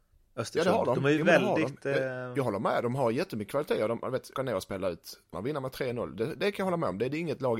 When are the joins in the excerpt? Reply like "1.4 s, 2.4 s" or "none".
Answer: 4.4 s, 5.3 s